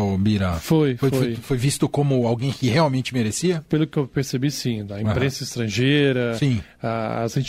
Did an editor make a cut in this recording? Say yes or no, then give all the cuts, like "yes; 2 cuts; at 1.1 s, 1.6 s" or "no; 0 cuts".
no; 0 cuts